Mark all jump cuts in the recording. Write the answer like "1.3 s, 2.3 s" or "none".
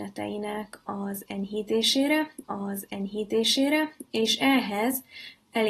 2.4 s